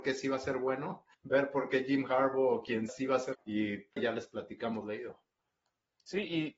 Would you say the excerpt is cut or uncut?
cut